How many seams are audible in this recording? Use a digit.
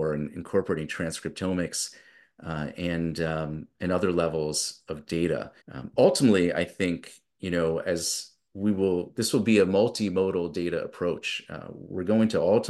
1